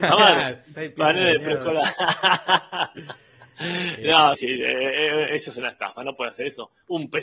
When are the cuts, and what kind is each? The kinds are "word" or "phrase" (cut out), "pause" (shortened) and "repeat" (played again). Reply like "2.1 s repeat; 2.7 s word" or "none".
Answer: 4.3 s word